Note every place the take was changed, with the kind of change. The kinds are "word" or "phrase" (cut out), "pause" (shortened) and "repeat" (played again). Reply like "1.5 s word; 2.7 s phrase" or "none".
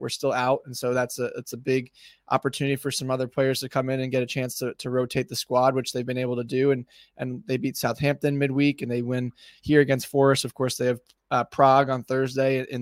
none